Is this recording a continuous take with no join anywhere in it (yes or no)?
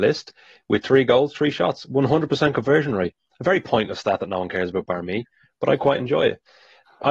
yes